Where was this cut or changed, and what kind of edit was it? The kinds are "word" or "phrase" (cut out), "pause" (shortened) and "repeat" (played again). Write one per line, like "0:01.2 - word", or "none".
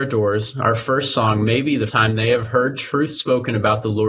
0:01.9 - word